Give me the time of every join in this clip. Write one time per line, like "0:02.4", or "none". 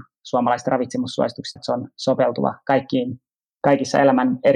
0:01.6